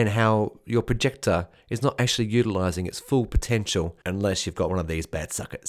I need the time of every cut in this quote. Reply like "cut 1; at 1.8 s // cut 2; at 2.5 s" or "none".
cut 1; at 4.0 s